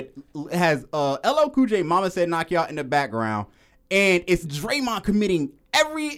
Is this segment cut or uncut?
cut